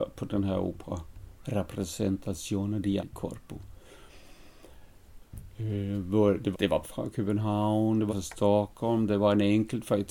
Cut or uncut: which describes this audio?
cut